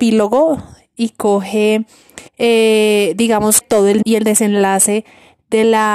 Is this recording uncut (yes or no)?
no